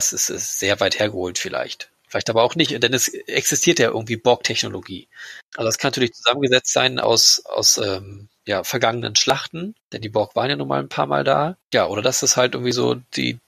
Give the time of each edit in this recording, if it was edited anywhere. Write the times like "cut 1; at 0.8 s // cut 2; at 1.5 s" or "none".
cut 1; at 5.4 s // cut 2; at 8.4 s // cut 3; at 9.8 s // cut 4; at 11.6 s